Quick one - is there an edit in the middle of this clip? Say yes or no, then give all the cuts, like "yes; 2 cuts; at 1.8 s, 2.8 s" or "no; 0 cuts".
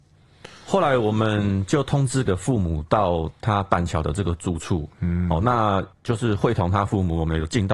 yes; 2 cuts; at 2.3 s, 5.9 s